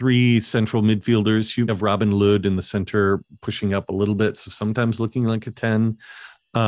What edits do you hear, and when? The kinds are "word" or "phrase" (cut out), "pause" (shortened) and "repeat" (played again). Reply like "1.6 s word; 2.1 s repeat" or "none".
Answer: 1.7 s word